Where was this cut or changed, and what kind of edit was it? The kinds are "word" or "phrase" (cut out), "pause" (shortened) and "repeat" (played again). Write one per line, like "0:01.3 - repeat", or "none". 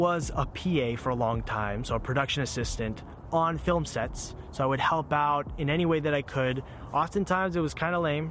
none